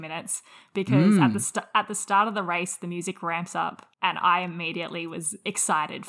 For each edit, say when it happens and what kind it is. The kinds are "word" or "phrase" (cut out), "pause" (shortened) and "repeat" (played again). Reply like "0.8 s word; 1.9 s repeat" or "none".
3.9 s pause